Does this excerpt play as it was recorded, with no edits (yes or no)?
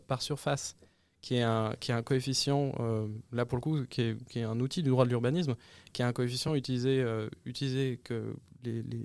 yes